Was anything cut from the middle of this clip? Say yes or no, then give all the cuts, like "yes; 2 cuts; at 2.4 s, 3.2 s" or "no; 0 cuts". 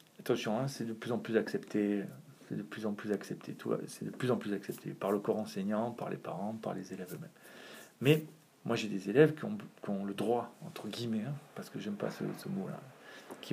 no; 0 cuts